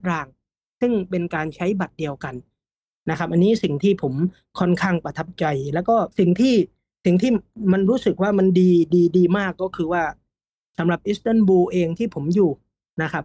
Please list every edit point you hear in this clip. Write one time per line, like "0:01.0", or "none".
0:06.1